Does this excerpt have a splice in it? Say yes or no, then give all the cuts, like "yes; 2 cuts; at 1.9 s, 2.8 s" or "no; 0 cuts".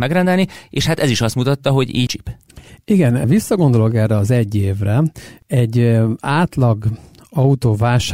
yes; 2 cuts; at 2.1 s, 3.2 s